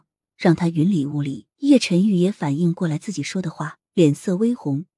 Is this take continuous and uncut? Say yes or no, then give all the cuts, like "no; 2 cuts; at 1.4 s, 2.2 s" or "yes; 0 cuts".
no; 2 cuts; at 1.5 s, 3.9 s